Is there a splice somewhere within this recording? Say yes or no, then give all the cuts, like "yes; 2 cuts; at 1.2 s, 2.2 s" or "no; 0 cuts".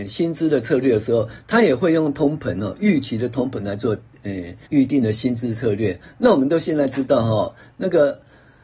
yes; 1 cut; at 4.7 s